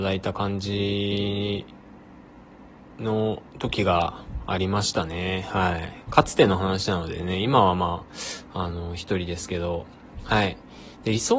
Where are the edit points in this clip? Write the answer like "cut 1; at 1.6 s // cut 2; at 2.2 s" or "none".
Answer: cut 1; at 3.5 s